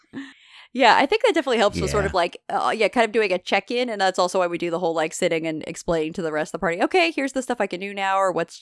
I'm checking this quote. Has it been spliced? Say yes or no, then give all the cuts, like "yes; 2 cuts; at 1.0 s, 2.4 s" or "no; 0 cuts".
no; 0 cuts